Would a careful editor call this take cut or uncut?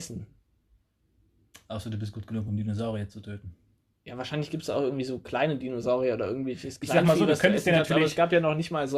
uncut